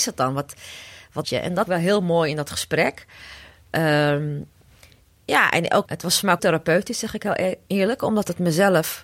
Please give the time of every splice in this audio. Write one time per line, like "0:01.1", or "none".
0:01.2
0:01.7
0:05.8
0:06.4